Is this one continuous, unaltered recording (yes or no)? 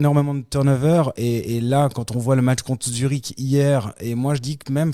yes